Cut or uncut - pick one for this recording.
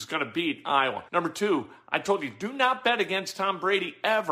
cut